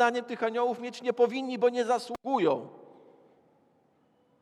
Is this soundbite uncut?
yes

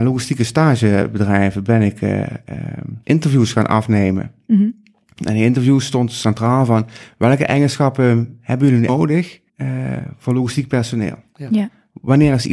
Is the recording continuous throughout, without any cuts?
no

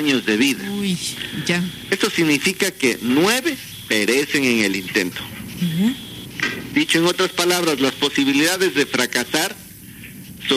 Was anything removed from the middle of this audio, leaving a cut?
no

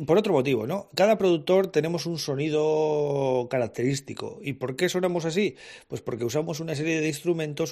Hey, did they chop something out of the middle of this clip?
no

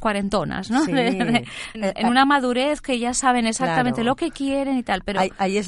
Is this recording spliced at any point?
yes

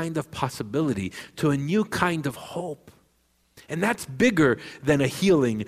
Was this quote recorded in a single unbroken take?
yes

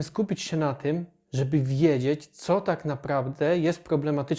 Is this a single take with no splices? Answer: yes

